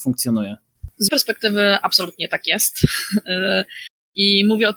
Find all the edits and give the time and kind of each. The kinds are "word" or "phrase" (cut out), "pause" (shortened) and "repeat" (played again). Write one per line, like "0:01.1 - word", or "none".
0:01.1 - word